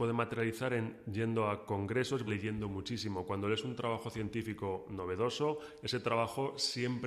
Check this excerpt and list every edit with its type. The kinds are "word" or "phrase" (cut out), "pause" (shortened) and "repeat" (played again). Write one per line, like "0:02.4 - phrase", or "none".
0:02.3 - word